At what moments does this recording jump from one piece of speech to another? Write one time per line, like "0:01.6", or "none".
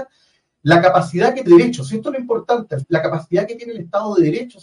0:01.5
0:02.8